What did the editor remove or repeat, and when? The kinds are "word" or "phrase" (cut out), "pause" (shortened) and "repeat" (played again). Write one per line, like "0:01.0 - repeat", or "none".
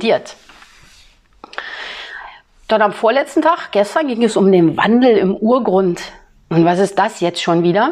none